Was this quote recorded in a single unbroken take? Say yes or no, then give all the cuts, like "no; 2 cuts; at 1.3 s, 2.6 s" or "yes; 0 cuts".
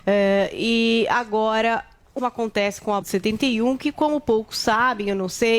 no; 2 cuts; at 2.2 s, 3.0 s